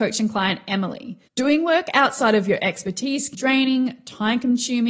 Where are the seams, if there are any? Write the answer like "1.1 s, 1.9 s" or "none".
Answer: 1.3 s, 3.3 s